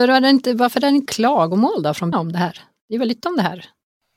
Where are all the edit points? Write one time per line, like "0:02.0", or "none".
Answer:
0:01.1
0:02.1
0:03.2